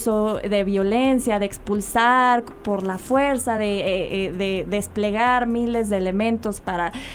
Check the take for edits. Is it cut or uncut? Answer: uncut